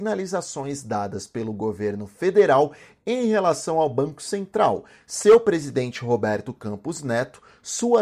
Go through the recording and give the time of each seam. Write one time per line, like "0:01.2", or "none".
none